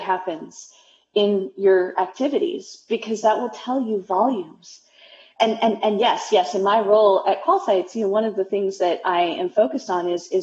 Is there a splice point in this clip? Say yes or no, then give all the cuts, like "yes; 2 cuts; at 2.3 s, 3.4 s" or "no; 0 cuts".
no; 0 cuts